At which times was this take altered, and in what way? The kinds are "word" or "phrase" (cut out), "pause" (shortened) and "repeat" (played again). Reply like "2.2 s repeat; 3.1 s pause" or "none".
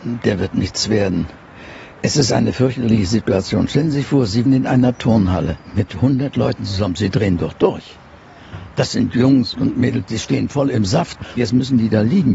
1.9 s pause; 4.5 s word; 9.5 s word; 11.4 s word